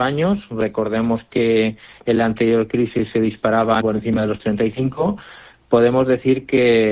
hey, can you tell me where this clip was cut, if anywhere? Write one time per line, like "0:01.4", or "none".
0:03.8